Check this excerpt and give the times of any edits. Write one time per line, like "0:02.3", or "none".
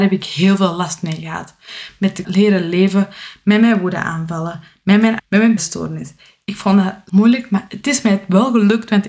0:02.2
0:05.2
0:05.6
0:07.1